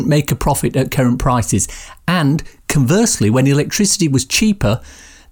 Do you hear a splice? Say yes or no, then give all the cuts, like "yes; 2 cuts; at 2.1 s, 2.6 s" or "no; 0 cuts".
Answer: no; 0 cuts